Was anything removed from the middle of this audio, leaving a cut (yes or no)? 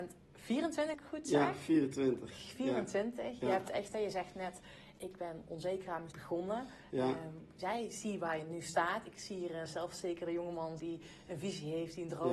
yes